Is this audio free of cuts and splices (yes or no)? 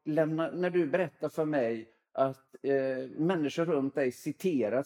yes